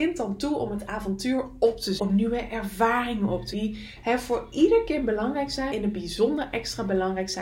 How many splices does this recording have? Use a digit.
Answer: 3